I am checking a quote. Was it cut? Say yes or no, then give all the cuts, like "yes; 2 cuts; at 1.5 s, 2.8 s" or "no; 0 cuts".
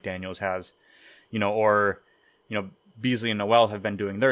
no; 0 cuts